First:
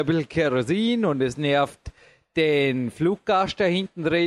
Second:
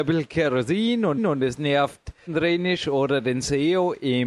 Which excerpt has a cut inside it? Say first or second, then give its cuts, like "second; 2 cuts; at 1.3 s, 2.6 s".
second; 2 cuts; at 1.2 s, 2.3 s